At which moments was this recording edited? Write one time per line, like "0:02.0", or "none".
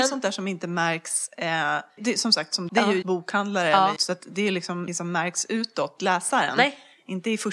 0:02.0
0:02.7
0:03.0
0:04.0
0:04.9
0:06.0